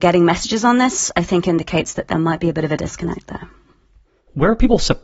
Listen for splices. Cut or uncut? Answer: uncut